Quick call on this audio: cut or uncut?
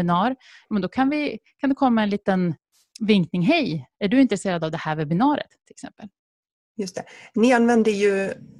uncut